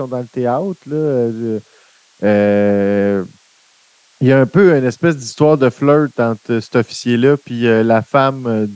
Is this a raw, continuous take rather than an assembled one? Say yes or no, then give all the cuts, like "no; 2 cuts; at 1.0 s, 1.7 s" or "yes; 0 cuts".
yes; 0 cuts